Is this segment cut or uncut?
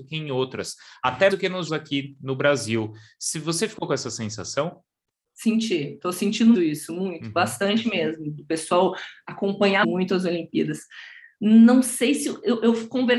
cut